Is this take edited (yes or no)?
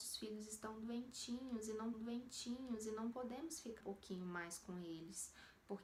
yes